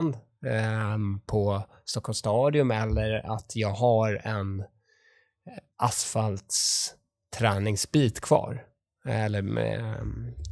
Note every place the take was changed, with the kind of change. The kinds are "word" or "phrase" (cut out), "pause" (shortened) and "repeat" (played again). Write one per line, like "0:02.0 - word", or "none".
none